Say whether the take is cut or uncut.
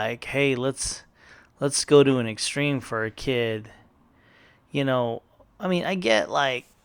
uncut